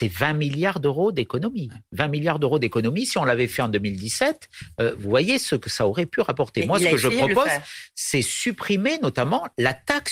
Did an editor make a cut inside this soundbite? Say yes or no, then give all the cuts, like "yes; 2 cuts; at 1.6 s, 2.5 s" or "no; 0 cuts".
no; 0 cuts